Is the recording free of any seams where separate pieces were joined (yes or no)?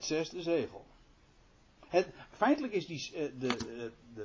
yes